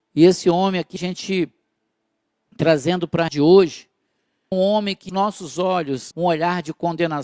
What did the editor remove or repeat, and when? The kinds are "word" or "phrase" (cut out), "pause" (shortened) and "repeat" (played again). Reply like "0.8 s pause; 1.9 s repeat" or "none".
1.0 s word; 3.3 s word; 4.5 s word; 5.1 s word; 6.1 s word